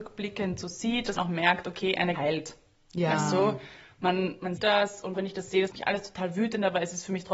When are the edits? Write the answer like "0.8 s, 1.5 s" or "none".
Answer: 1.2 s, 2.1 s, 4.6 s, 5.1 s, 5.7 s